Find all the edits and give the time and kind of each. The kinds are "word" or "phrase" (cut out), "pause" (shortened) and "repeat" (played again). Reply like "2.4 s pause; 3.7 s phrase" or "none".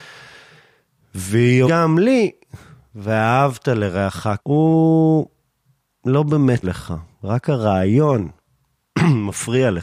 1.6 s word; 4.4 s word; 6.6 s word